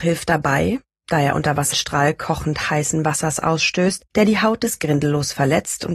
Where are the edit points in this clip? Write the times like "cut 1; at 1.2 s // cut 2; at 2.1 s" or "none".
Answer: cut 1; at 1.7 s // cut 2; at 4.1 s